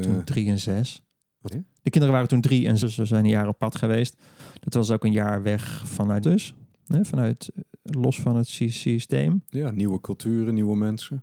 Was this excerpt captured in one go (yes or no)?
no